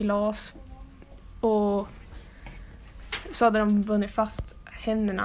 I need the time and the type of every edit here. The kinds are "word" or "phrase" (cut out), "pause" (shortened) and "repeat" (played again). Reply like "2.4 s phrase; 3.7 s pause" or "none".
none